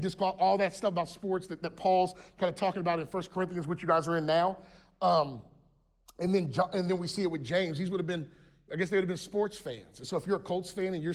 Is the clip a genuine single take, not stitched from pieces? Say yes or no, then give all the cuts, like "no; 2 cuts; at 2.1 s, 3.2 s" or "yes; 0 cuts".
yes; 0 cuts